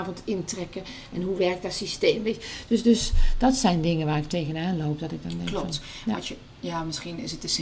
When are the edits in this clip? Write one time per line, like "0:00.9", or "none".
none

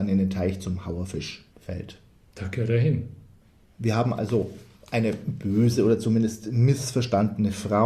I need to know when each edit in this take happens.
0:01.5
0:03.4

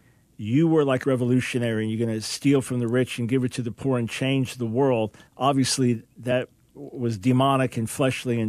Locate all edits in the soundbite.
0:01.0
0:05.3

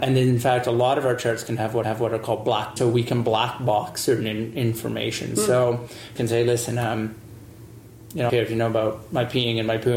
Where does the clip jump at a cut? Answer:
0:01.8
0:02.8
0:06.2
0:08.3

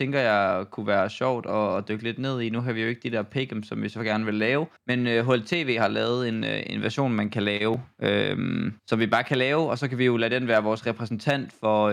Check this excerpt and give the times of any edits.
0:04.8
0:08.8

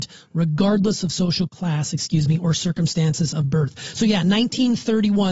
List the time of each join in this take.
0:01.5

